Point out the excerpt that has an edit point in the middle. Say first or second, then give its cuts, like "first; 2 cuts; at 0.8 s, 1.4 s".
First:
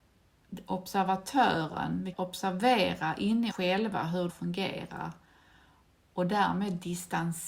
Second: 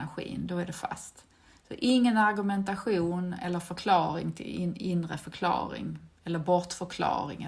first; 3 cuts; at 2.1 s, 3.5 s, 4.3 s